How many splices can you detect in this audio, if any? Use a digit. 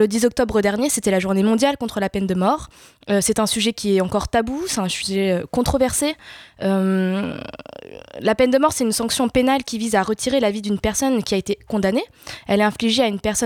0